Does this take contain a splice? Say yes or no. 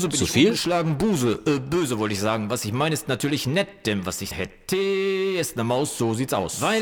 yes